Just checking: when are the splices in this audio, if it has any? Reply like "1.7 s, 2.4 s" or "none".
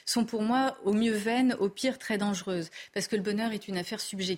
none